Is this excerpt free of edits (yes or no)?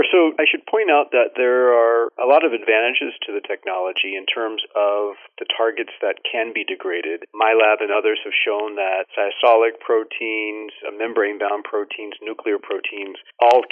yes